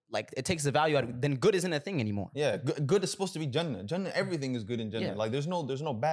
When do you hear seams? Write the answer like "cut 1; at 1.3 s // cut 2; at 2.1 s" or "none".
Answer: none